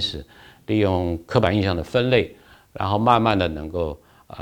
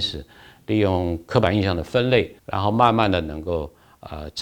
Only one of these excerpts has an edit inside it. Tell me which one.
second; 1 cut; at 2.4 s

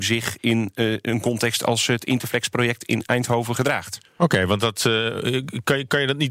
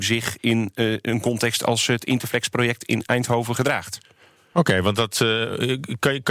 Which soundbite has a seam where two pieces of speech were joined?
first; 1 cut; at 4.1 s

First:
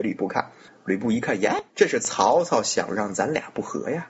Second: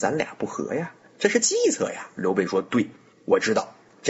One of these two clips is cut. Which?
first; 1 cut; at 1.7 s

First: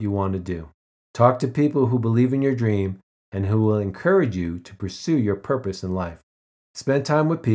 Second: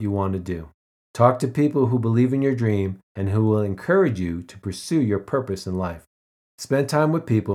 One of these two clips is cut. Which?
second; 1 cut; at 3.0 s

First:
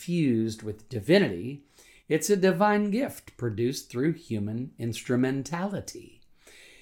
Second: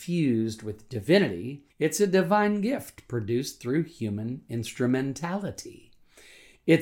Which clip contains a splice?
second; 1 cut; at 1.7 s

